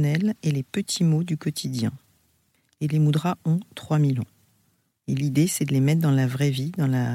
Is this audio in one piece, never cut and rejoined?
yes; 0 cuts

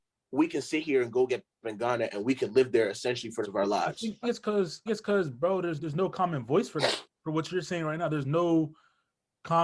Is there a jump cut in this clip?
yes; 5 cuts; at 1.6 s, 3.4 s, 4.2 s, 4.9 s, 5.8 s

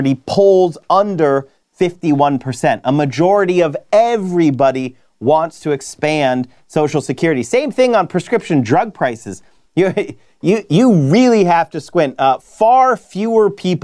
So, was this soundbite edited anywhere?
no; 0 cuts

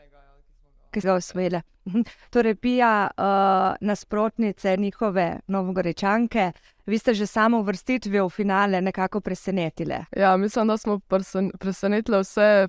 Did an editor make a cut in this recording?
yes; 2 cuts; at 1.0 s, 10.1 s

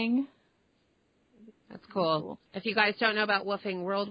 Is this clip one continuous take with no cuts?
no; 1 cut; at 2.5 s

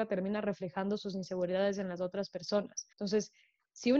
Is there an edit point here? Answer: yes; 1 cut; at 2.9 s

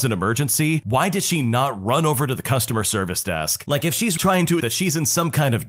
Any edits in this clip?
yes; 2 cuts; at 4.2 s, 4.6 s

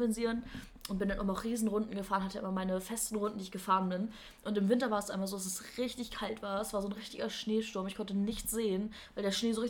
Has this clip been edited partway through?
no; 0 cuts

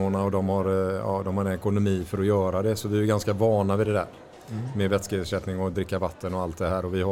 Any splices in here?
no; 0 cuts

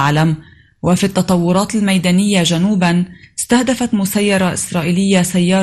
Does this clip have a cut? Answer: no; 0 cuts

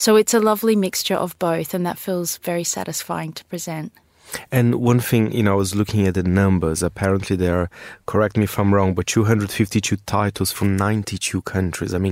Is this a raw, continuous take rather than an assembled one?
yes; 0 cuts

